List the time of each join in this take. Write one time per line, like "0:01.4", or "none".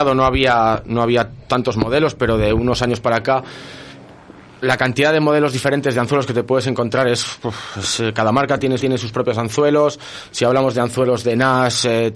0:01.5
0:08.8